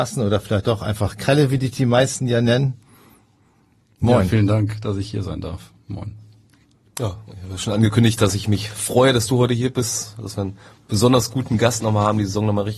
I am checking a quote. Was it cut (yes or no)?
no